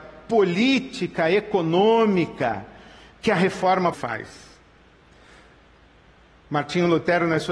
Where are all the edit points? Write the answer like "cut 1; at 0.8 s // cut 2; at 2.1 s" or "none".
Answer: cut 1; at 3.9 s